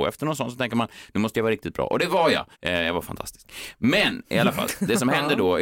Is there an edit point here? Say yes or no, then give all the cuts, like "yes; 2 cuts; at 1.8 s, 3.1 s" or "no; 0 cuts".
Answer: yes; 1 cut; at 2.5 s